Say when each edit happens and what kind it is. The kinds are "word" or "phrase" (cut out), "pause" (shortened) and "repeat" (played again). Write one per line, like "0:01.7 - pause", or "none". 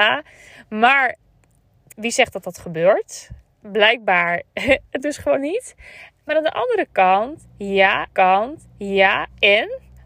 0:01.9 - word
0:05.0 - word
0:05.4 - word
0:08.1 - repeat

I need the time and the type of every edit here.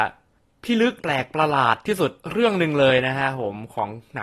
0:01.0 - pause
0:02.2 - pause

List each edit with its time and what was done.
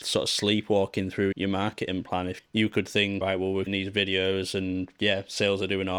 0:01.3 - word
0:02.4 - word
0:03.2 - word
0:03.7 - word

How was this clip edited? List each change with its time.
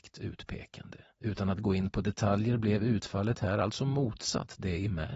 0:01.1 - pause

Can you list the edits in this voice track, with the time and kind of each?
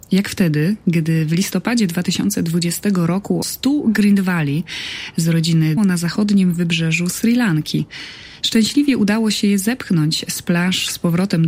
0:03.4 - word
0:05.8 - phrase

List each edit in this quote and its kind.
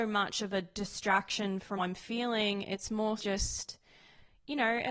0:01.8 - word
0:03.2 - word

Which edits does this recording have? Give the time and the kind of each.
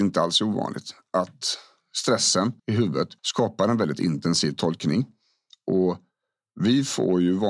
0:02.6 - pause
0:03.2 - pause

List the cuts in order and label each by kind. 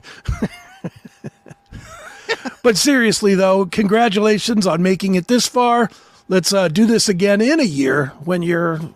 none

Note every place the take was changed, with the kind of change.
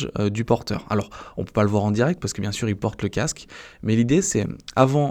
none

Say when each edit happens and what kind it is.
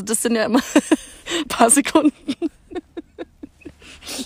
0:01.5 - word

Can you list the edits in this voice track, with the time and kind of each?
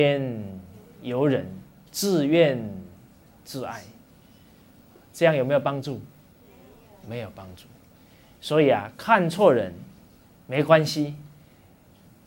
none

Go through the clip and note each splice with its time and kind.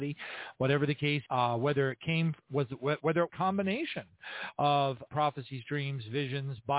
0:01.3 - word
0:03.3 - phrase
0:05.1 - word

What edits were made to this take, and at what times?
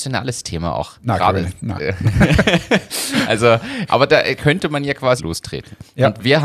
0:03.9 - word
0:04.4 - word
0:05.2 - word

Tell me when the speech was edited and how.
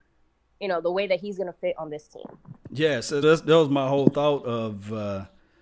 0:03.2 - word

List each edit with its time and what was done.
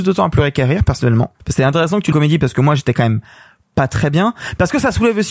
0:01.4 - pause
0:02.1 - phrase

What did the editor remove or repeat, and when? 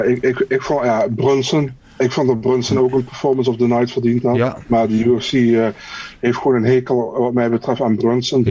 none

